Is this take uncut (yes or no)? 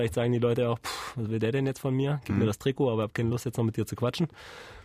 yes